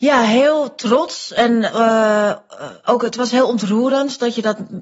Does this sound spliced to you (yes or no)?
no